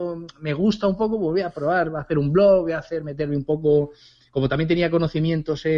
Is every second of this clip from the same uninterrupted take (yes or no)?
yes